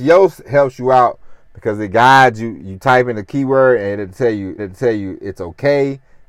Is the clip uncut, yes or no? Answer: no